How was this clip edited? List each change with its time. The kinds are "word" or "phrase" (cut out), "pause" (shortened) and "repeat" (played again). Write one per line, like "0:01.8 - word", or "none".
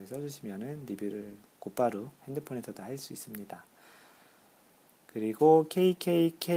none